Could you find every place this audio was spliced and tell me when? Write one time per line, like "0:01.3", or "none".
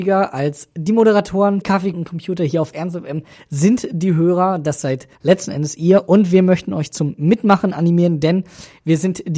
0:01.6
0:01.9
0:05.1

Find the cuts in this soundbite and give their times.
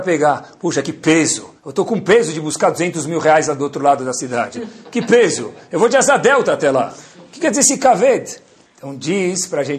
0:01.6

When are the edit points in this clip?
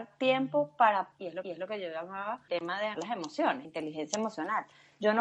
0:01.1
0:01.4
0:02.5
0:02.9
0:03.6

